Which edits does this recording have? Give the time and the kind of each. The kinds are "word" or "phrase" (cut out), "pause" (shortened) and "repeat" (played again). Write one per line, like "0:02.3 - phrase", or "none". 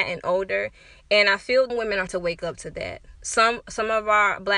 0:01.7 - phrase
0:02.1 - word
0:03.2 - pause